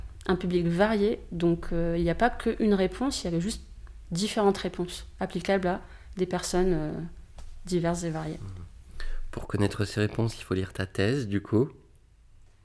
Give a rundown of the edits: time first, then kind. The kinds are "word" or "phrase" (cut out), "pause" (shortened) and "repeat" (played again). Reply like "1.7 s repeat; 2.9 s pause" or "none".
none